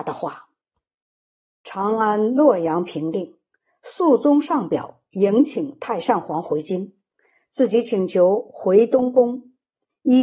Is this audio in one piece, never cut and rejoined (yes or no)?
yes